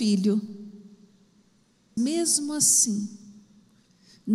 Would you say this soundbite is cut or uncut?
cut